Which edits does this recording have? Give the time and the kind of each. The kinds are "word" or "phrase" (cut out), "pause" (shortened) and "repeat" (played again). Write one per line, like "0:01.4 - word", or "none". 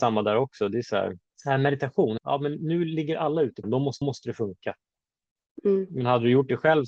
0:01.2 - pause
0:02.2 - word
0:03.6 - phrase
0:04.0 - repeat